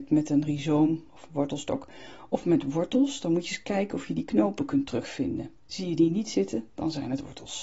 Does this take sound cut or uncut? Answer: cut